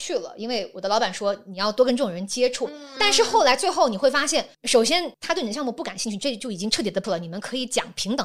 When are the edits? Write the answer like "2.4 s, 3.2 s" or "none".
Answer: 4.5 s, 5.1 s, 7.0 s